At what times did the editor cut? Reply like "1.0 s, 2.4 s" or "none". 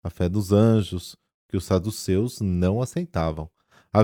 none